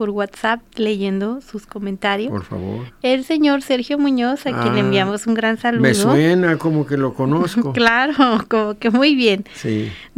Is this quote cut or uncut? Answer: uncut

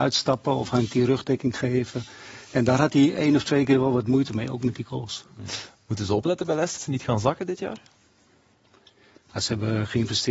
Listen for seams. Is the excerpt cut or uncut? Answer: cut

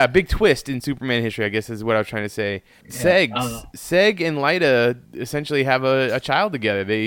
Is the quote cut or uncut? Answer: cut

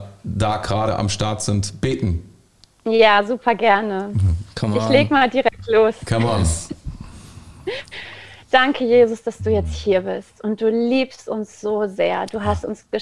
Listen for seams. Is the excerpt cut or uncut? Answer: uncut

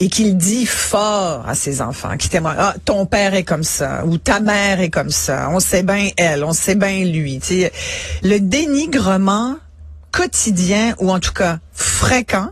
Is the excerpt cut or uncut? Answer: uncut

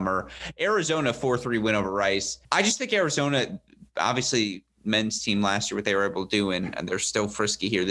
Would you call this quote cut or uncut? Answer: cut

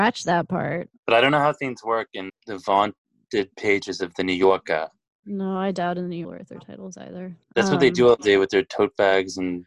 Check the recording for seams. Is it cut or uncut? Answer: cut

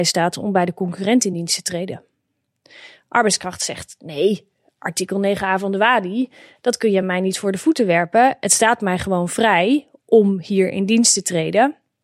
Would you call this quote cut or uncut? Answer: uncut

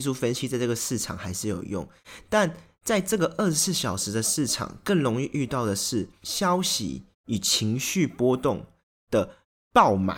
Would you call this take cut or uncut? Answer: cut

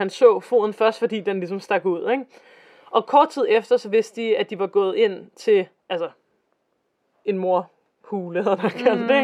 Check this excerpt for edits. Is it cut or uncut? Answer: uncut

